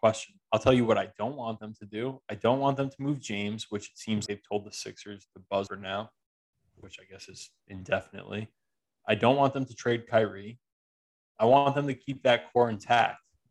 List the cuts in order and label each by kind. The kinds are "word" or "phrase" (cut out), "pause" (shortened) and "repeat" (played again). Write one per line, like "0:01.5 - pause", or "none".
0:04.3 - word
0:05.7 - word
0:06.8 - word